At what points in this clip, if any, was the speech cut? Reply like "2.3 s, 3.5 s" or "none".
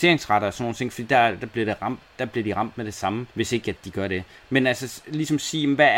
3.3 s

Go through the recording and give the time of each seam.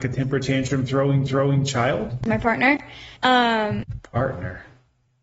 1.3 s, 3.2 s

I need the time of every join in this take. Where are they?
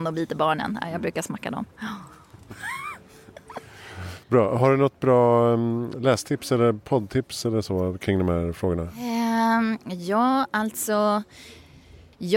4.2 s, 5.9 s

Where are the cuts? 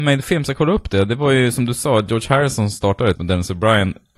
3.2 s

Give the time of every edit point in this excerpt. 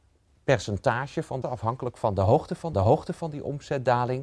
1.4 s, 2.7 s

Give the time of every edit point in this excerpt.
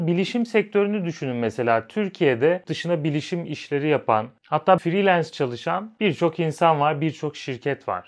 2.6 s, 4.8 s

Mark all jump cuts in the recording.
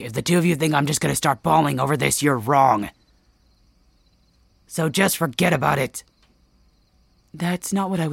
none

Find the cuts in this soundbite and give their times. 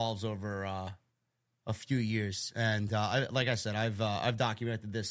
none

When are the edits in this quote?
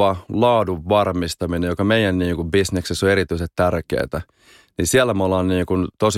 none

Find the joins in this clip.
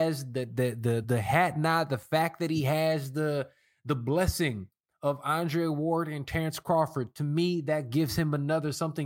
1.0 s

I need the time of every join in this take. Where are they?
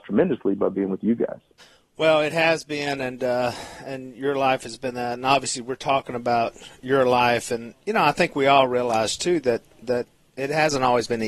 1.6 s

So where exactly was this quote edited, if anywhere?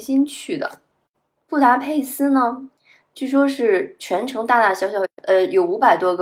2.8 s

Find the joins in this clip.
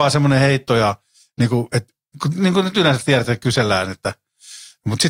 none

